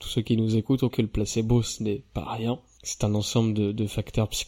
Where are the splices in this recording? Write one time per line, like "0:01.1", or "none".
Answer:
0:00.9